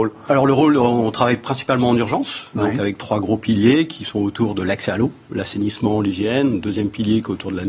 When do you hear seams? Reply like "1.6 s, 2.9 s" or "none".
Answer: none